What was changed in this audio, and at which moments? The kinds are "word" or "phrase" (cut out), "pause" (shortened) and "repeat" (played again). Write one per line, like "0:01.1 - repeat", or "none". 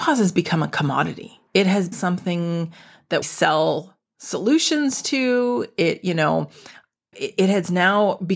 0:01.5 - pause
0:01.9 - word
0:03.2 - word
0:07.1 - word